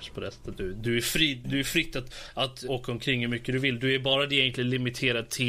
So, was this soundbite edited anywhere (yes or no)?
yes